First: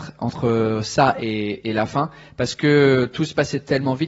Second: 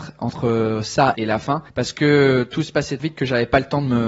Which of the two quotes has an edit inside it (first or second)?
second